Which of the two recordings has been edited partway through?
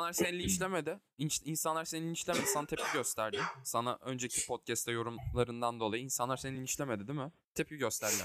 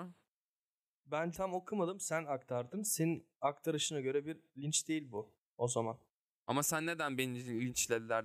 second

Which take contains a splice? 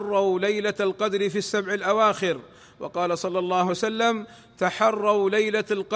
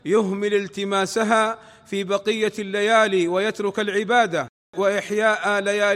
first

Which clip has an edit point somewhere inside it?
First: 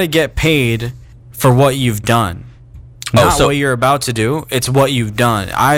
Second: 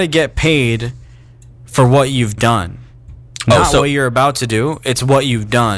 first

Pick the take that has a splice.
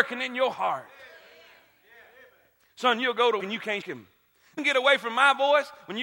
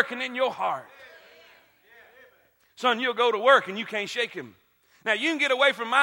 first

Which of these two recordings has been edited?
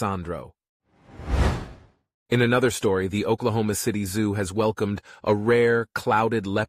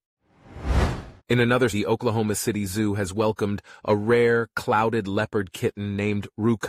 second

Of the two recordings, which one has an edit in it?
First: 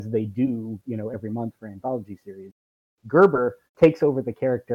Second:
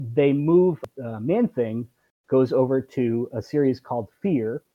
first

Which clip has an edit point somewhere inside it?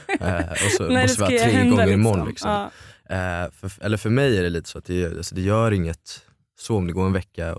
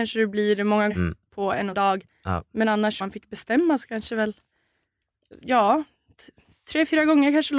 second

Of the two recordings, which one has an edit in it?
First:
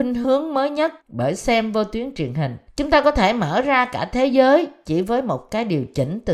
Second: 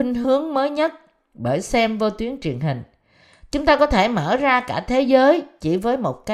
first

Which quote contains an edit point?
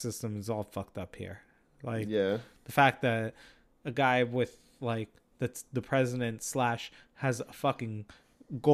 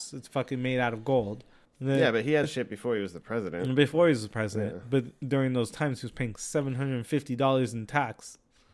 second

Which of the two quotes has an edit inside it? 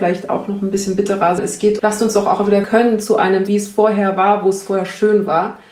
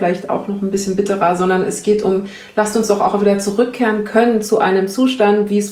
first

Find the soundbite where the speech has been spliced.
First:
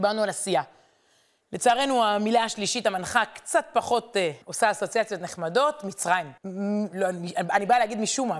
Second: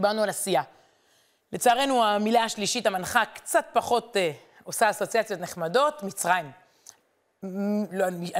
first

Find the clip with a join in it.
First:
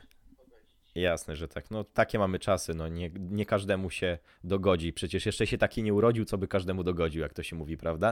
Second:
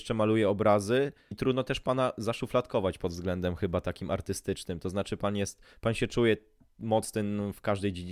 second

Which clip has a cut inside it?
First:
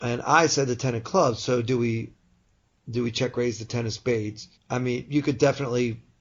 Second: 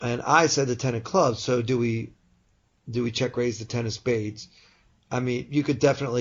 first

